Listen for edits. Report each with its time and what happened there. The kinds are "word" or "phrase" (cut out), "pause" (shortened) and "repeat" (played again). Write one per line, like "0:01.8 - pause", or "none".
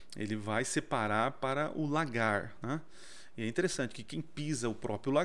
none